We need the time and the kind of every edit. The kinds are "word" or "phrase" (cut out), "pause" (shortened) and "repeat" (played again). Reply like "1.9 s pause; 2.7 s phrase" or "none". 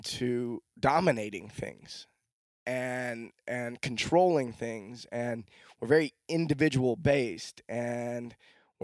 none